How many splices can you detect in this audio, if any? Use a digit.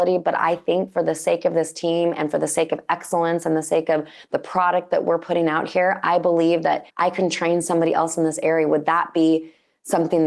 1